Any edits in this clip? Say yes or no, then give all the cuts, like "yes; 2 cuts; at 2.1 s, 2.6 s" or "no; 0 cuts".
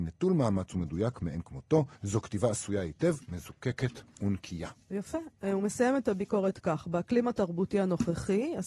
yes; 2 cuts; at 1.9 s, 3.2 s